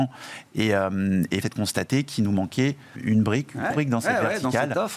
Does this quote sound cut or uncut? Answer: cut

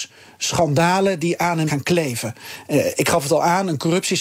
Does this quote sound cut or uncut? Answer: cut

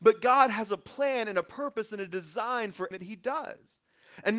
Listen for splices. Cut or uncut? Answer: cut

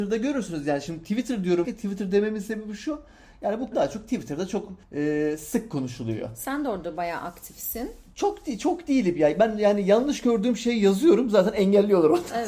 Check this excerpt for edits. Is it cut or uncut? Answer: cut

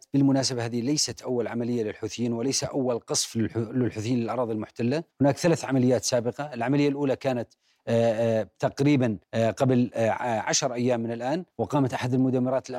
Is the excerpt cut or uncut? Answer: cut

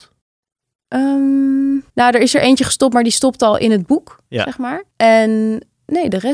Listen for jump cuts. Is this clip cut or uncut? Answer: cut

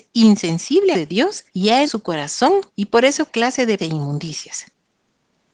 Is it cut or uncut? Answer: cut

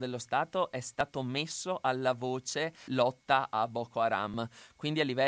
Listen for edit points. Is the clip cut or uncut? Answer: cut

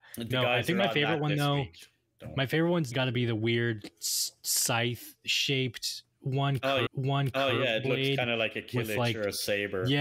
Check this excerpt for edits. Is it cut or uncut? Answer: cut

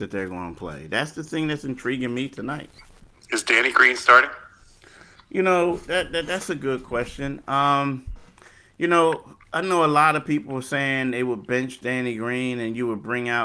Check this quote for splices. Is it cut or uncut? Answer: uncut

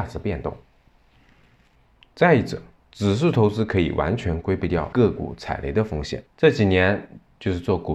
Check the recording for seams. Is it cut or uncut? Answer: cut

